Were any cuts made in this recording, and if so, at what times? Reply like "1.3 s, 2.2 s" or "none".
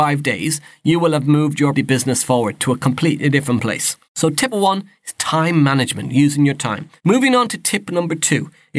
1.7 s, 4.0 s, 4.5 s, 7.0 s